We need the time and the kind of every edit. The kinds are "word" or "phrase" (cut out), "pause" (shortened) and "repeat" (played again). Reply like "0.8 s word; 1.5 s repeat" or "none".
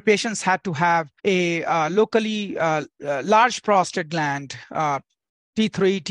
1.2 s pause